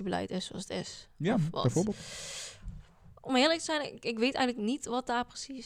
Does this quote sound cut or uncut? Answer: uncut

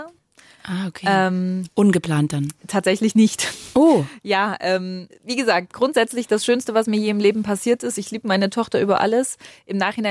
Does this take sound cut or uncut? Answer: cut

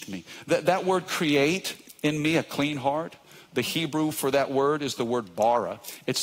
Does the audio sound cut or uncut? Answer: uncut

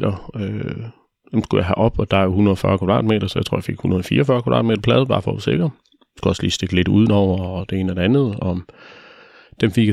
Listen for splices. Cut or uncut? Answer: cut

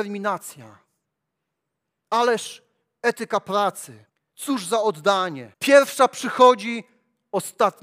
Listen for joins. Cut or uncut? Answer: cut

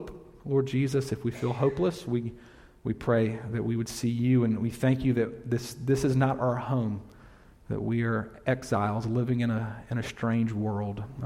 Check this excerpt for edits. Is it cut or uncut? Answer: uncut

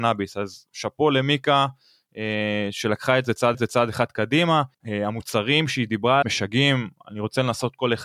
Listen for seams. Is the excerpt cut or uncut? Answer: cut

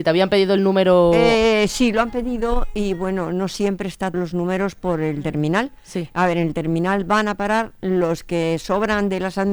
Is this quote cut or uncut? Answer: cut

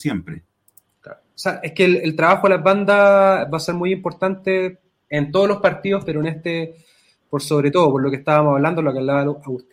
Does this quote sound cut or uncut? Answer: uncut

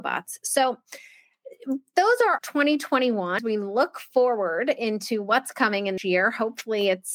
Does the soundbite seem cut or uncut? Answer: cut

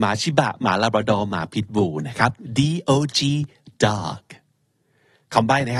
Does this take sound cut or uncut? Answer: uncut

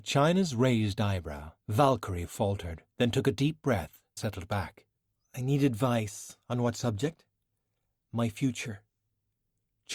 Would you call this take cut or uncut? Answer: cut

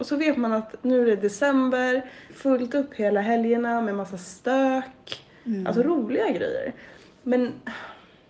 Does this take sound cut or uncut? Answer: cut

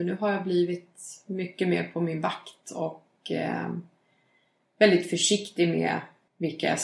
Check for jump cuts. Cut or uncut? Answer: uncut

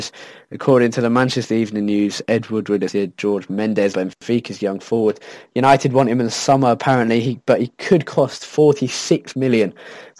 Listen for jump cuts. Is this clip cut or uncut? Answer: cut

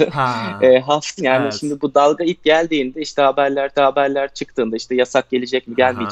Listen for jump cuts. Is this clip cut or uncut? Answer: cut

